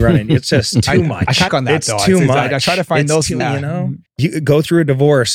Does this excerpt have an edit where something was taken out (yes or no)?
yes